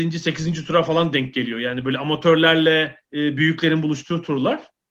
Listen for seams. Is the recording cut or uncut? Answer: cut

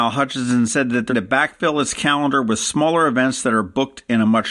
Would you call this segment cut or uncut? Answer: cut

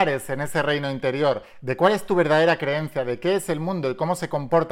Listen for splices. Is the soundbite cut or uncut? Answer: uncut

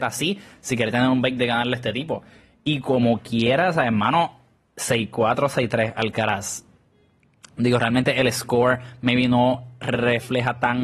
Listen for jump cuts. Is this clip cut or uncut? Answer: uncut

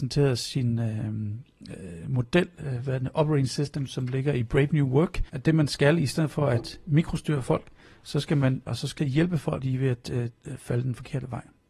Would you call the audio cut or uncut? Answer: cut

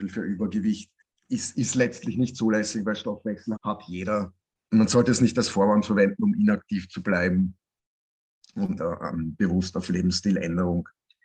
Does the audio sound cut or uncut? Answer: cut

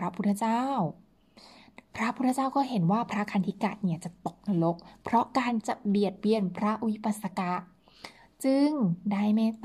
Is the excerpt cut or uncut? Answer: uncut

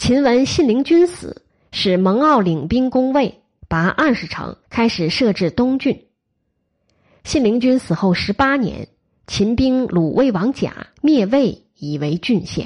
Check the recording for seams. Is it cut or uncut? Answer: cut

